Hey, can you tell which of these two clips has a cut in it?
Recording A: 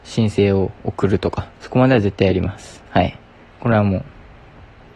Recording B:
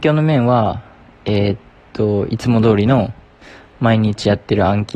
A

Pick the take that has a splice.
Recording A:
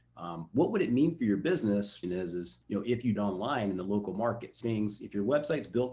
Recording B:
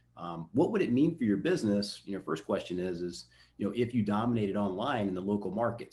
A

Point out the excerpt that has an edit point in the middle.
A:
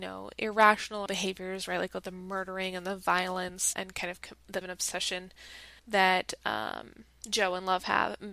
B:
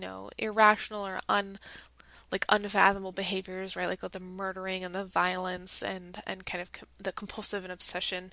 A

